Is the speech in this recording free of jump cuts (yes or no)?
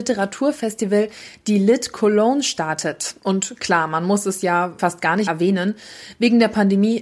no